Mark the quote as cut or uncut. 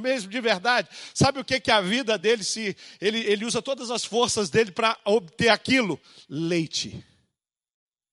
uncut